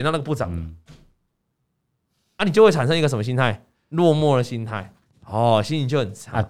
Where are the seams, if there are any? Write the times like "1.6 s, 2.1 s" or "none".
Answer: 3.7 s

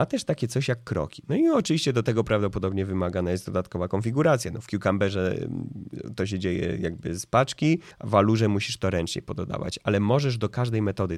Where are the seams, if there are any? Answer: 7.9 s

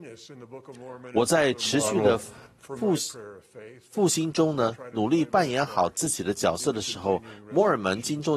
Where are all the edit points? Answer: none

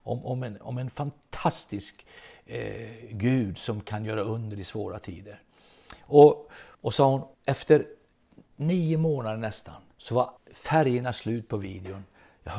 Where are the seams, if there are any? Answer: 6.7 s, 7.3 s, 9.9 s, 10.4 s

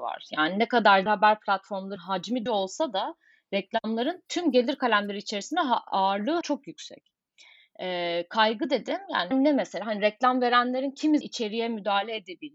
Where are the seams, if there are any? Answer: 1.1 s, 2.0 s, 2.5 s, 6.4 s, 9.3 s, 11.2 s

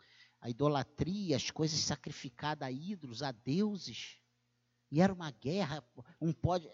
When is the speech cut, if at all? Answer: none

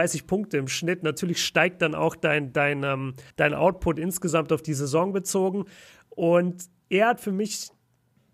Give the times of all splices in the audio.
3.3 s, 6.8 s

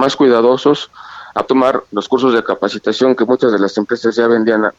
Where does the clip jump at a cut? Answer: 1.4 s, 1.9 s

